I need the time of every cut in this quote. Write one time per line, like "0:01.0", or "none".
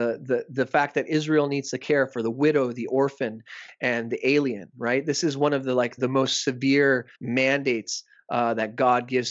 0:06.0
0:07.1